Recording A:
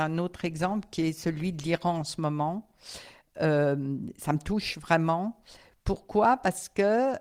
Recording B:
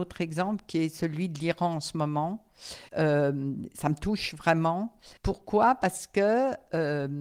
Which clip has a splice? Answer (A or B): B